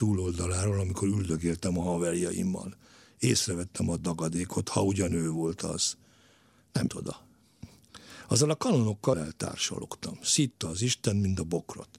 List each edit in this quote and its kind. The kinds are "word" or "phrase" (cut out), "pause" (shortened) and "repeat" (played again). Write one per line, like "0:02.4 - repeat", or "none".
0:06.9 - word
0:09.1 - word